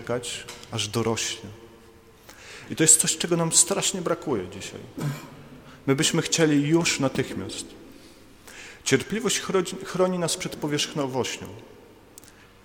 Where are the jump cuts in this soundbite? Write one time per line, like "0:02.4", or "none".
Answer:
none